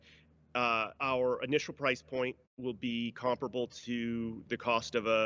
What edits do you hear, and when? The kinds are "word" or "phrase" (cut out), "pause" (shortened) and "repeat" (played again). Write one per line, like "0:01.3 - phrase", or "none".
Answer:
0:01.0 - pause